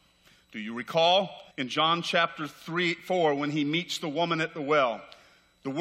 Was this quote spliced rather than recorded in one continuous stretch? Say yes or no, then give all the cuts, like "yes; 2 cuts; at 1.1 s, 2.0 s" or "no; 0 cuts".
yes; 1 cut; at 1.5 s